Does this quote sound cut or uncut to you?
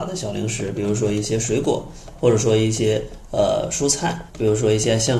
cut